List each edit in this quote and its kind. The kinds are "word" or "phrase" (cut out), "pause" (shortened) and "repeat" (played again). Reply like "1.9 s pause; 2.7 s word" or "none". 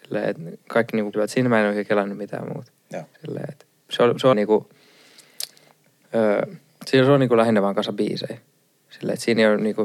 1.1 s word; 3.1 s pause; 4.3 s phrase; 6.7 s pause